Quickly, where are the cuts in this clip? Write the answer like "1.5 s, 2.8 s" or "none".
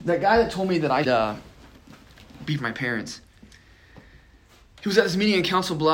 1.0 s, 2.6 s